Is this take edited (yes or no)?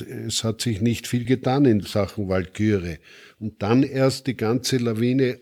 no